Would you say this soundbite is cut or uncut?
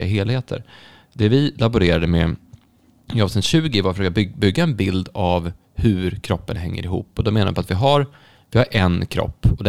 uncut